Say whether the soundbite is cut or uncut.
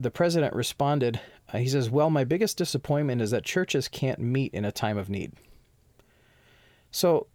uncut